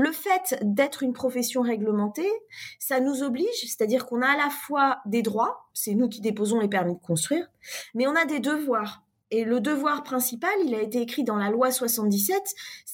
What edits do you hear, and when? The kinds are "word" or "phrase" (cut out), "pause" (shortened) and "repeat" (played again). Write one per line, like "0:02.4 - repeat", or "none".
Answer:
0:05.7 - pause